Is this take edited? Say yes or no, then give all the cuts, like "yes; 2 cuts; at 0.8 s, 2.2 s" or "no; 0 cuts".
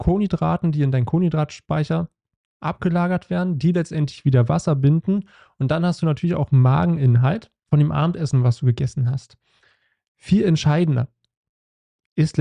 no; 0 cuts